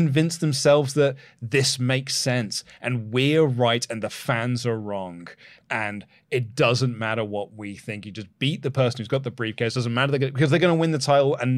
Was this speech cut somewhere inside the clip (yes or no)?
no